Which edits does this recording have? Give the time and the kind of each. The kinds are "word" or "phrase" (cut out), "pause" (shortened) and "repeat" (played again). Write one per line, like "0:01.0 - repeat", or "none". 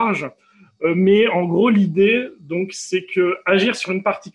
none